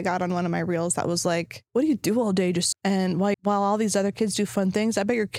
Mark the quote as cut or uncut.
cut